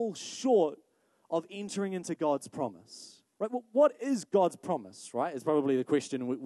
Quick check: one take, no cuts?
no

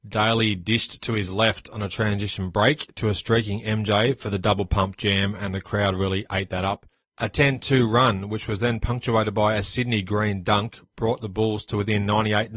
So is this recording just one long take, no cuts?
yes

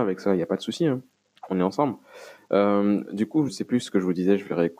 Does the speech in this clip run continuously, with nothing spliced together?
no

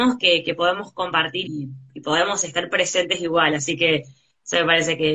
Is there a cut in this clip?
yes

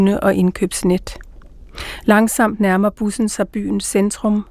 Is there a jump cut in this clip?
no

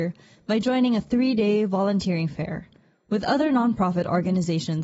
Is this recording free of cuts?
yes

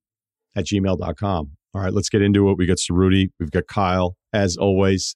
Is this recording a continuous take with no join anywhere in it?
no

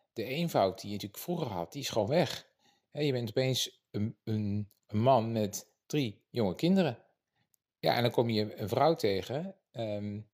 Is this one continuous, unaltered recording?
yes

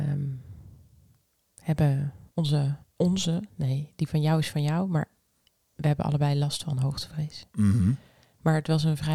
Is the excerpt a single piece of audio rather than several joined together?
no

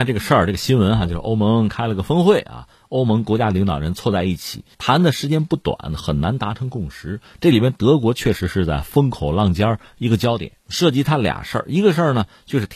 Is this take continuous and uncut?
no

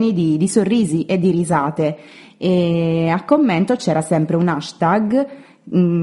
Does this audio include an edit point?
no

